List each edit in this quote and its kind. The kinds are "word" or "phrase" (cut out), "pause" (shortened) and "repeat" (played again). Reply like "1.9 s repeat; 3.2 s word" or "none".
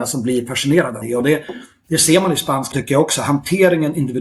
1.0 s word; 2.7 s word